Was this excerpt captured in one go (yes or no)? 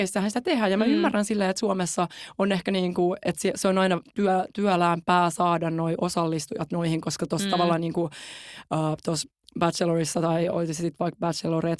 yes